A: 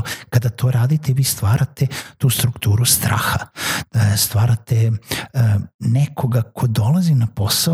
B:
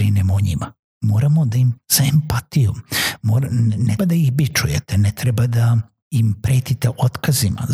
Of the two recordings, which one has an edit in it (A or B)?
B